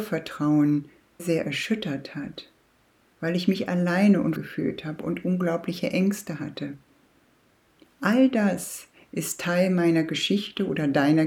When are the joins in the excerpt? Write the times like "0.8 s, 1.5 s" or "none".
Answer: 1.2 s, 4.4 s